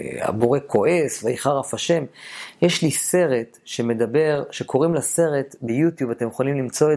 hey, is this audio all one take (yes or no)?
yes